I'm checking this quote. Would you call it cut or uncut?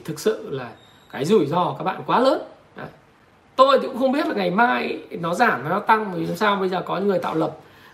uncut